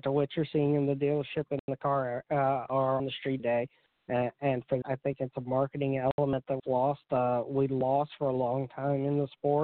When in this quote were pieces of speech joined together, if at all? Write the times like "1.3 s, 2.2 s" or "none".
3.0 s, 3.4 s, 4.8 s, 6.6 s